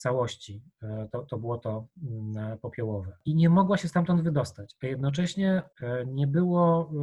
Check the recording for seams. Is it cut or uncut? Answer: uncut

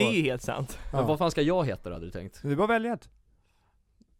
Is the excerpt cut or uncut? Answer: uncut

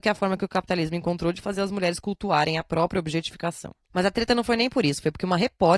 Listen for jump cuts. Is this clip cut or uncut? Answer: uncut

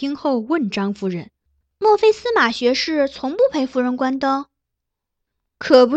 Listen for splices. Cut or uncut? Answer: uncut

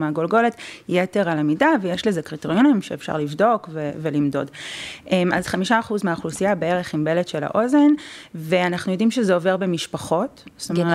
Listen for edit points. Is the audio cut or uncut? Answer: uncut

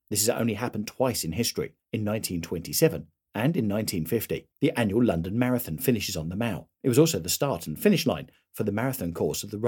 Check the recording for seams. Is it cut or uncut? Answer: cut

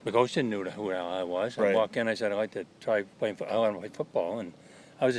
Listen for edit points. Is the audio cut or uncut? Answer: cut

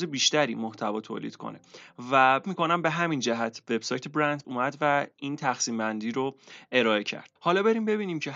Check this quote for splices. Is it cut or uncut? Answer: cut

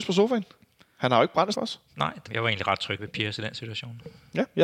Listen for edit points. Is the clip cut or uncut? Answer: cut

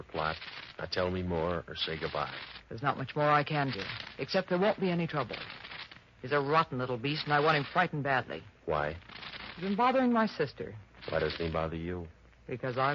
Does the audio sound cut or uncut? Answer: cut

